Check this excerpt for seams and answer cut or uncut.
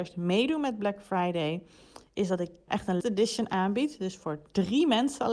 cut